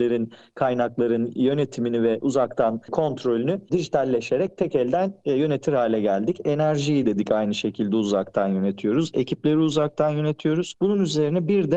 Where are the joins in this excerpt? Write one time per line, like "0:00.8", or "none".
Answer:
none